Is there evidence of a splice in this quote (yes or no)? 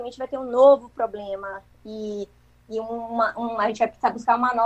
no